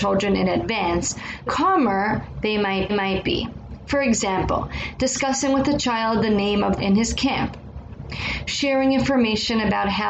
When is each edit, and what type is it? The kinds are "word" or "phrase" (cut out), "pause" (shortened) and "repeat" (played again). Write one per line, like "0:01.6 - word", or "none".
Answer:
0:01.5 - word
0:02.9 - repeat
0:06.8 - phrase

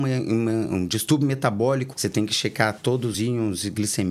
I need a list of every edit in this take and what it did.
0:01.9 - word
0:03.1 - word

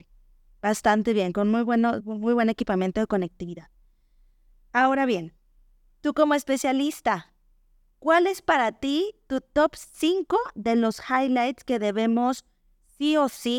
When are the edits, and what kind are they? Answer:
0:02.0 - word

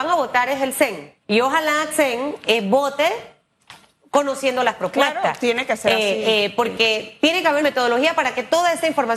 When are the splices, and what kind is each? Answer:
0:01.2 - pause
0:01.9 - phrase
0:07.6 - word

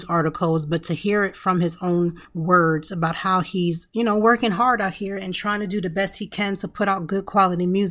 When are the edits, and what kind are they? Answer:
0:02.2 - pause

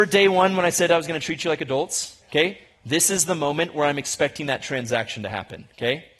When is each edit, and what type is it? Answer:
0:02.2 - pause

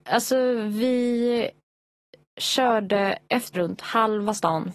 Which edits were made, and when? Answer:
0:03.5 - word

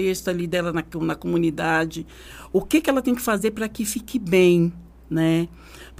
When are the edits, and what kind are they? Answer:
none

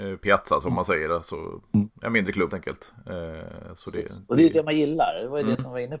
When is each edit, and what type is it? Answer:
0:02.5 - word

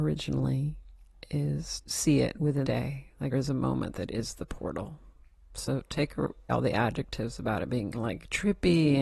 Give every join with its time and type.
0:01.8 - word
0:02.6 - word
0:03.3 - word
0:06.5 - word
0:07.9 - word

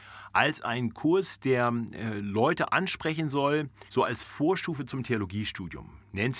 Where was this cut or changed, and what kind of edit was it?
0:03.9 - pause

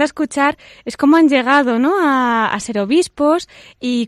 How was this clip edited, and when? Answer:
none

